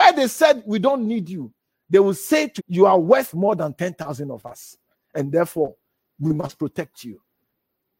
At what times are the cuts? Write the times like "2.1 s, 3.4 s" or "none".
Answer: 2.6 s